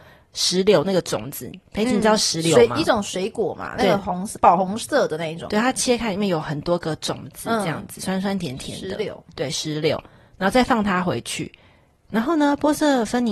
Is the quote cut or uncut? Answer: uncut